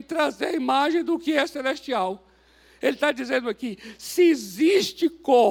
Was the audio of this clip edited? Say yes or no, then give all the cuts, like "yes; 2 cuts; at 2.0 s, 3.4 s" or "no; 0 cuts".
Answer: no; 0 cuts